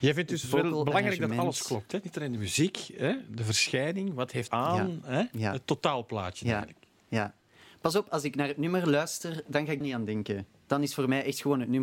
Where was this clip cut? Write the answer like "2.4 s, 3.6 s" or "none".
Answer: 4.5 s, 9.8 s